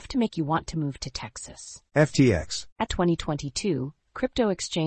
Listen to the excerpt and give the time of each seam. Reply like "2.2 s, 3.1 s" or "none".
1.9 s, 2.9 s

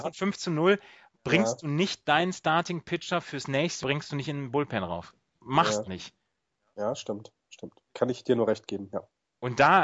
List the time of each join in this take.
3.8 s, 5.8 s, 7.8 s

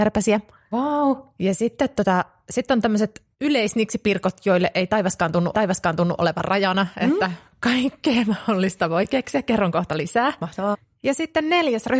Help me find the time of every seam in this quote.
3.3 s, 5.5 s

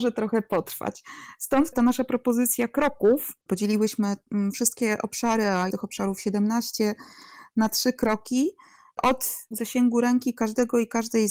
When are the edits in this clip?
3.4 s, 5.7 s, 9.5 s

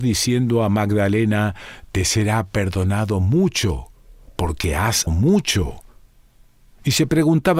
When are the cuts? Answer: 5.1 s

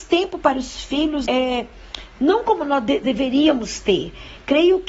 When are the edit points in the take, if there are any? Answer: 1.3 s, 3.0 s

